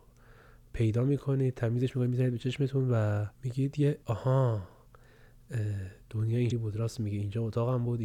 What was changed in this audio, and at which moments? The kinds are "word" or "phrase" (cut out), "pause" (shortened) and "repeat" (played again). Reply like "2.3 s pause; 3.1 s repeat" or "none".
3.3 s pause; 4.0 s pause; 6.5 s word